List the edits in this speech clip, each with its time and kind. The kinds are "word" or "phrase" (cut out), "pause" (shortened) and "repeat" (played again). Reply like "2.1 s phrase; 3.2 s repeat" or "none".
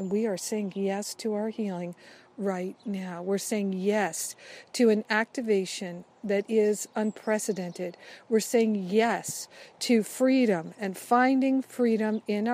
none